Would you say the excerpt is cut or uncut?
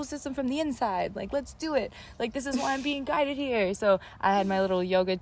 uncut